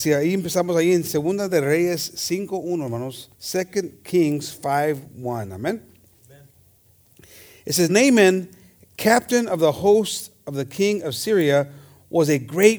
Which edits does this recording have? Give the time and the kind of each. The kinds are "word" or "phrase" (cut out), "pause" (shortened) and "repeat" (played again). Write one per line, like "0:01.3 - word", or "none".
0:03.3 - pause
0:07.9 - word